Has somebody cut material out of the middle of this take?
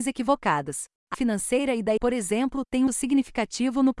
yes; 3 cuts; at 1.1 s, 2.0 s, 2.9 s

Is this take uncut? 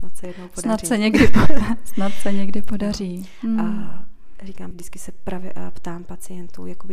no; 1 cut; at 4.7 s

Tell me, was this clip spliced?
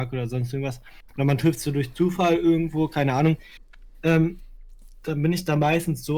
no; 0 cuts

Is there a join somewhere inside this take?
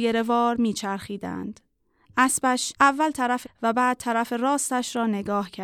yes; 2 cuts; at 2.8 s, 3.4 s

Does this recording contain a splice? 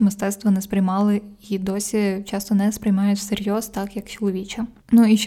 no; 0 cuts

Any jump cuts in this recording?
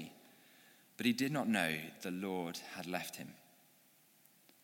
yes; 1 cut; at 2.0 s

